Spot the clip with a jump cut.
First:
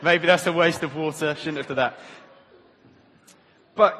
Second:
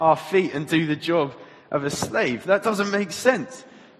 first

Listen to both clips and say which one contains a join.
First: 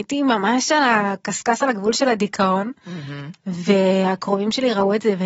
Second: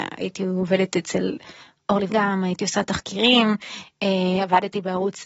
second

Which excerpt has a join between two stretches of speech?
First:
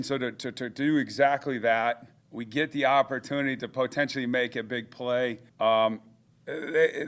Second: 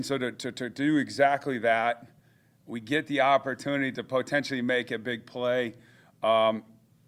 first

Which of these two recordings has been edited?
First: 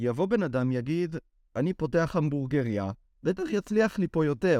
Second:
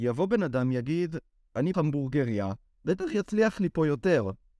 second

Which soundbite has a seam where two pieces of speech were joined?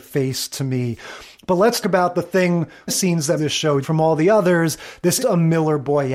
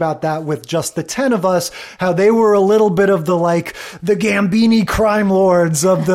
first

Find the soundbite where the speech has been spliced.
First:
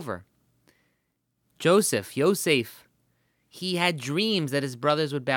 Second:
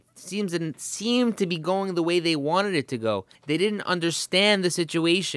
second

